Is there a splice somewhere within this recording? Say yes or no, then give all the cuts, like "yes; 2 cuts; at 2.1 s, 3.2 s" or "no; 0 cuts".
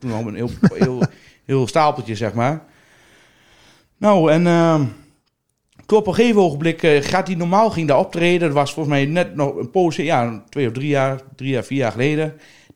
no; 0 cuts